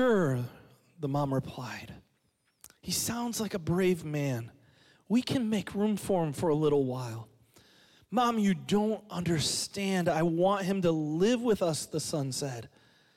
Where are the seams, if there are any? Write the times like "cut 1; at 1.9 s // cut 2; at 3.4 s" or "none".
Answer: none